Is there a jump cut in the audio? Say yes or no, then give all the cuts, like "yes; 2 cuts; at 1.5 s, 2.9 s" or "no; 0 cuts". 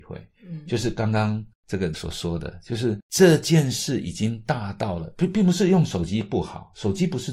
yes; 1 cut; at 1.9 s